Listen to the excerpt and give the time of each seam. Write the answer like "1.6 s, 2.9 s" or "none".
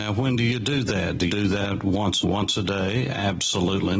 1.3 s, 2.2 s